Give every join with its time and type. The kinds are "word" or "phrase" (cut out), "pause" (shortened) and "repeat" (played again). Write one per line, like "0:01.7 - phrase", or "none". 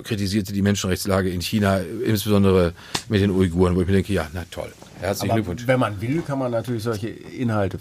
none